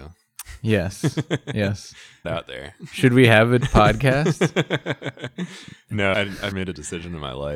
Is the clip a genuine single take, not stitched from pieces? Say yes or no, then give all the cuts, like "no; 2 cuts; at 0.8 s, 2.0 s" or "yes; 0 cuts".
no; 4 cuts; at 2.2 s, 3.6 s, 6.1 s, 6.5 s